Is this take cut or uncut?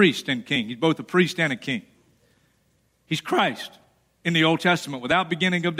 uncut